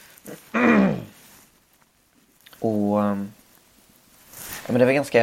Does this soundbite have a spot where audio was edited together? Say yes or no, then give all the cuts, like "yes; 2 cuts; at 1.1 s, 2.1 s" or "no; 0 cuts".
yes; 1 cut; at 2.6 s